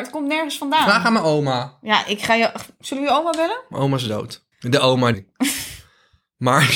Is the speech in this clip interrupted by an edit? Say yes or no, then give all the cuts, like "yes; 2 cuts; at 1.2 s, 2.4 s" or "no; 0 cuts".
yes; 2 cuts; at 4.5 s, 5.1 s